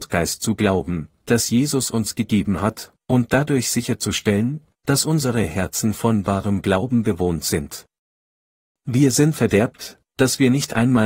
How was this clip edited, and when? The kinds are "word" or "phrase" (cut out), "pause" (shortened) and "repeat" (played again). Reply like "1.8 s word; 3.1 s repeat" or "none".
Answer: 9.3 s word